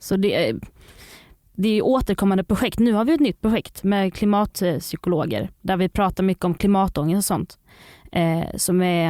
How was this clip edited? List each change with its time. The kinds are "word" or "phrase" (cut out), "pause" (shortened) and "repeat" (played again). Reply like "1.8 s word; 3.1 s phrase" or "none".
none